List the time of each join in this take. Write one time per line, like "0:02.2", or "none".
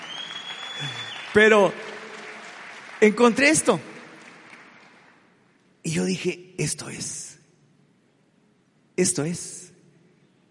none